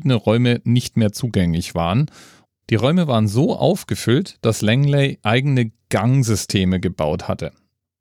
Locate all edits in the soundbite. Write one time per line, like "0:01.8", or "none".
none